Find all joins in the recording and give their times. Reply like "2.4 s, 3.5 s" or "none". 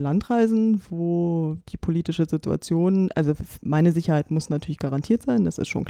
none